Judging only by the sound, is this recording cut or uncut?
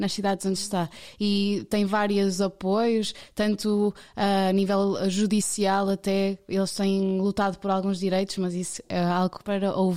uncut